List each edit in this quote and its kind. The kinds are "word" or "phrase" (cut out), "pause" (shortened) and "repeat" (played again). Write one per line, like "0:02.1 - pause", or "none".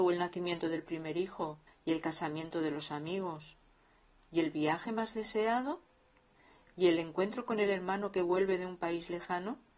0:01.7 - pause